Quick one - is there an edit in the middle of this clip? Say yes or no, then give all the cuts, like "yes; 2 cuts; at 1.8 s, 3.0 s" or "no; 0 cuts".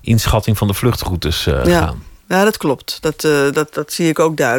no; 0 cuts